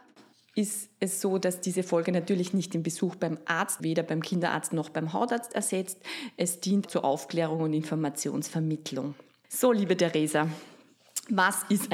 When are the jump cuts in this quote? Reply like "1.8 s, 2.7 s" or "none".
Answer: 3.8 s, 6.9 s